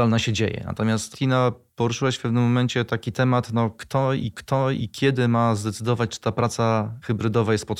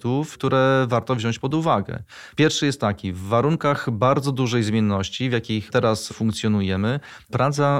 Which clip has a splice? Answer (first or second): first